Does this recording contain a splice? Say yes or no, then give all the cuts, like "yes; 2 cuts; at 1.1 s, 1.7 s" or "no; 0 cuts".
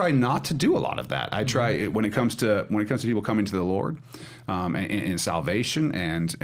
no; 0 cuts